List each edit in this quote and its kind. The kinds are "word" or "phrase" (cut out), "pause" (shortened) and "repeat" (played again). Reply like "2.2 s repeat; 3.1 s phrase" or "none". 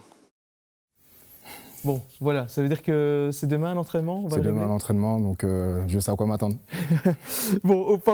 6.7 s pause

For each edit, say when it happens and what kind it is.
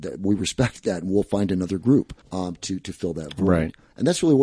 2.2 s pause

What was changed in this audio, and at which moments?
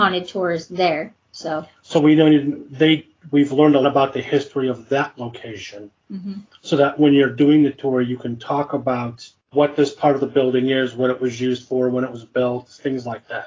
3.8 s word

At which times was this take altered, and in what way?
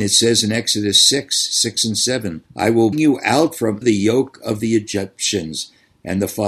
2.5 s pause; 2.9 s word; 3.8 s word

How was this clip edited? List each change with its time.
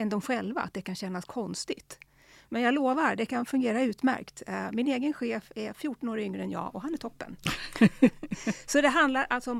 none

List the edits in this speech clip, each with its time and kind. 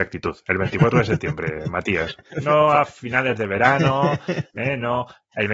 none

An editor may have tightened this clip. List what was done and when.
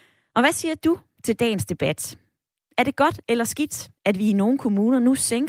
4.0 s pause

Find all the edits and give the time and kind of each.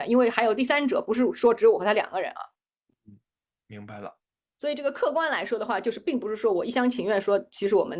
none

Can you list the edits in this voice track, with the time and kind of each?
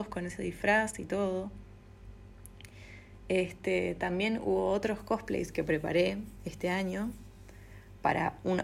none

